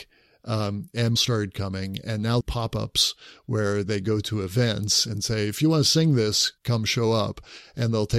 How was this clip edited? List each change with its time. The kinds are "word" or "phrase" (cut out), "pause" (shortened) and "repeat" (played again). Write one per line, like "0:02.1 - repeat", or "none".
0:01.2 - phrase
0:02.4 - phrase
0:06.6 - pause